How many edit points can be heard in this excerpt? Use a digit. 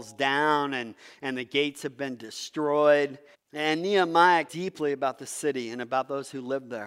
2